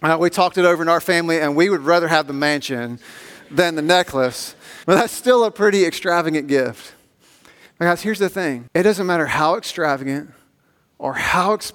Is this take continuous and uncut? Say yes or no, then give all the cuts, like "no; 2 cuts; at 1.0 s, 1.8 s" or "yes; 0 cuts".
no; 2 cuts; at 4.8 s, 8.7 s